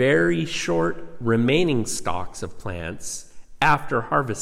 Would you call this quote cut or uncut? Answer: uncut